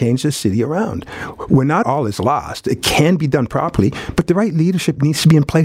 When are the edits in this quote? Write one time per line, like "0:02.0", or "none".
0:01.8